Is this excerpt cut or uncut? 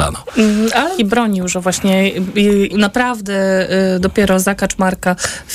cut